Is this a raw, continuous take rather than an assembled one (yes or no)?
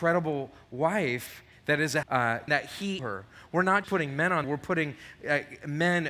no